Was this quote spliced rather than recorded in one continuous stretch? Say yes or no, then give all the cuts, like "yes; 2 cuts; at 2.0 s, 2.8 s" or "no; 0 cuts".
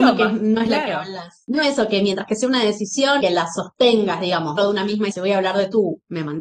yes; 4 cuts; at 1.6 s, 3.2 s, 4.6 s, 5.1 s